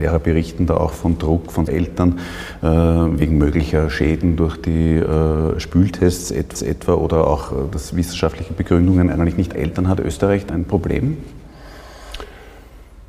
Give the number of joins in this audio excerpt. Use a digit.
4